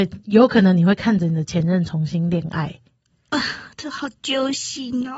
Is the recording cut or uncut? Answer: uncut